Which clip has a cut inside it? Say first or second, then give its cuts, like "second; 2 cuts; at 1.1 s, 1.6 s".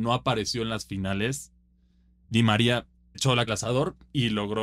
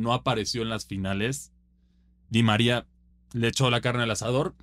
first; 2 cuts; at 3.1 s, 3.5 s